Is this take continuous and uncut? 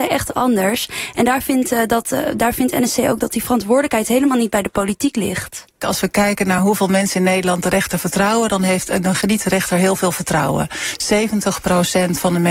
yes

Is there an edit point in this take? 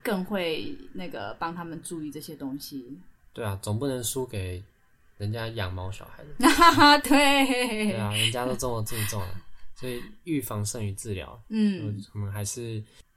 no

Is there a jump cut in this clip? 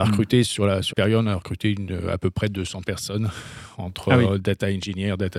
yes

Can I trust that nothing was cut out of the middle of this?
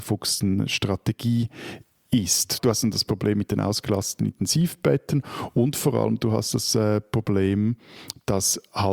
yes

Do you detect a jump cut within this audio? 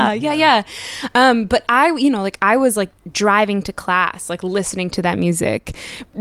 no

